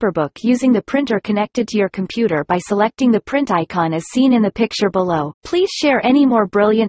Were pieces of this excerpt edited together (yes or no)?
yes